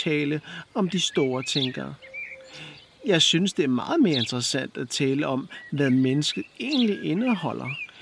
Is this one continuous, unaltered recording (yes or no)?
yes